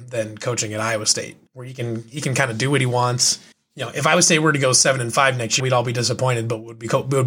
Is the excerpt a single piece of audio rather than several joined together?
no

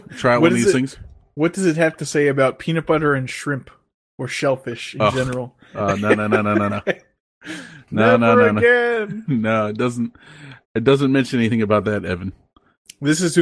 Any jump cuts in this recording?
yes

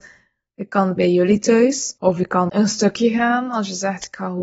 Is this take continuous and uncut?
no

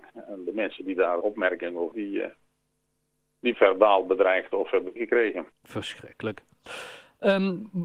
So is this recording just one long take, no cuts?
no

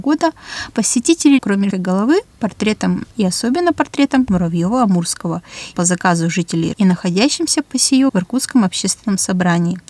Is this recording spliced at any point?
yes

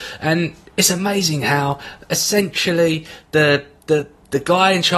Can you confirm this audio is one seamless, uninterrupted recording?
yes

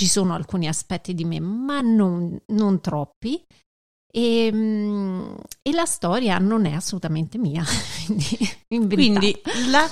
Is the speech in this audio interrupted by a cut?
no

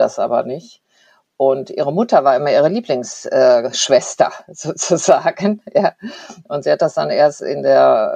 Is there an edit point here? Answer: no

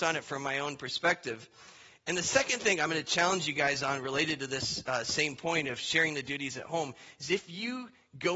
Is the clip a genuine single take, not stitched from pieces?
yes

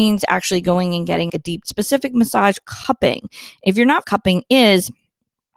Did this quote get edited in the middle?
yes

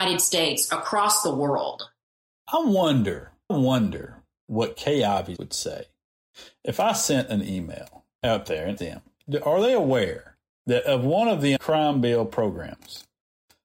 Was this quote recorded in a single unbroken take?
no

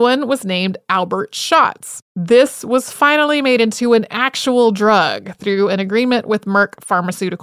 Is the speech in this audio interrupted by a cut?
yes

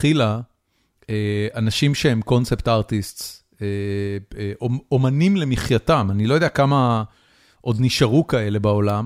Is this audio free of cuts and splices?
yes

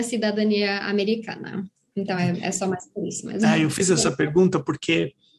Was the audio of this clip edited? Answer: no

